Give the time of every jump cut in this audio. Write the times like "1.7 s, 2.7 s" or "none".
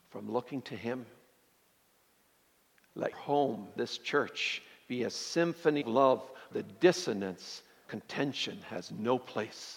3.1 s, 3.8 s, 5.8 s, 6.5 s, 7.8 s